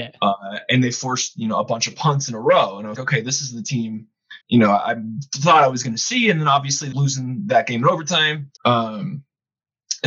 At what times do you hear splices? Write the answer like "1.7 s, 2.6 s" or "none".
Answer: 3.0 s, 4.4 s, 6.9 s, 8.6 s